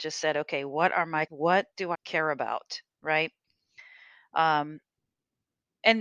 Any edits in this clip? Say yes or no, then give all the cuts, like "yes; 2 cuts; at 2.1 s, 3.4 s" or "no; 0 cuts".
yes; 2 cuts; at 1.3 s, 1.9 s